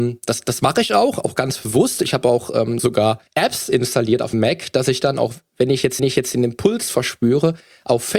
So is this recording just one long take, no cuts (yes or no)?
no